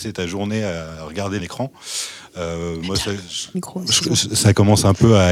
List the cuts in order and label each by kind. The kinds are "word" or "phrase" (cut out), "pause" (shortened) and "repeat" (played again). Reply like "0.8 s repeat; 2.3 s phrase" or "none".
1.4 s phrase; 3.5 s phrase